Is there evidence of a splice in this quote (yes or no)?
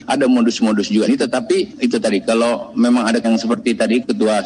yes